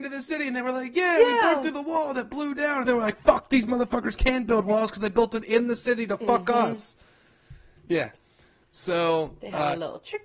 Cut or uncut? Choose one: cut